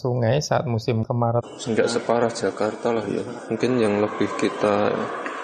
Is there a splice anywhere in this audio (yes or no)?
no